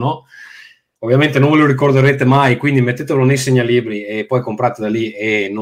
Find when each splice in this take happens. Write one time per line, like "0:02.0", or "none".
none